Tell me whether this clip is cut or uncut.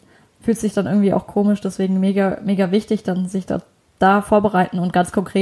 uncut